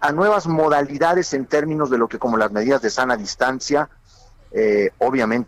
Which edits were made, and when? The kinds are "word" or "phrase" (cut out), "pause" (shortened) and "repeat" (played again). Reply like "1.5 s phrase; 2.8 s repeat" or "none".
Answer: 2.2 s word

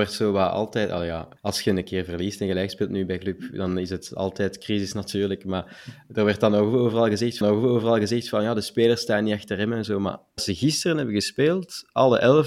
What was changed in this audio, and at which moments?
1.4 s pause; 7.4 s repeat; 10.4 s word

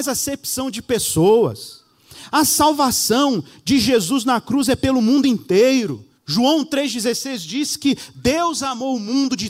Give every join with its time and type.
6.2 s pause

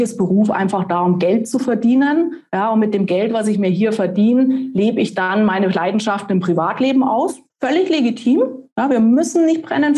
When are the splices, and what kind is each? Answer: 7.5 s pause

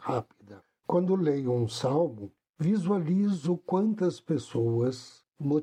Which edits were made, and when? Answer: none

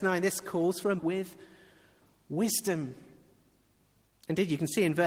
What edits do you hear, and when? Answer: 1.0 s word

